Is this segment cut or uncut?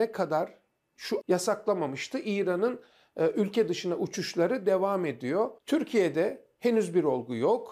cut